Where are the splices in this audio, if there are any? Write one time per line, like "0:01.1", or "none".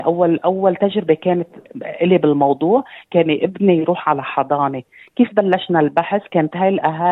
none